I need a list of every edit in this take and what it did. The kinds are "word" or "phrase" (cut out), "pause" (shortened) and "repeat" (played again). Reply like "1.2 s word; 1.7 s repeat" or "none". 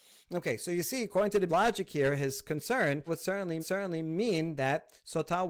1.5 s phrase; 3.1 s word; 3.6 s repeat

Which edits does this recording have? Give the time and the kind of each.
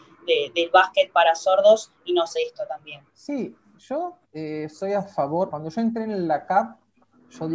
2.4 s word; 3.1 s pause; 4.2 s pause; 5.5 s word

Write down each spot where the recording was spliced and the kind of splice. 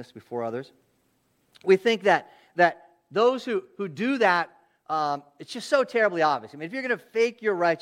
none

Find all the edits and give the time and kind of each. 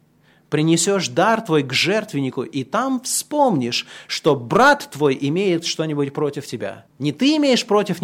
6.9 s pause

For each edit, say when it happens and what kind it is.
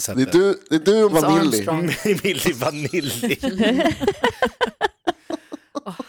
1.1 s word

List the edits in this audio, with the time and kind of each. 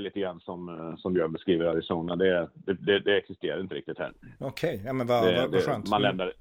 none

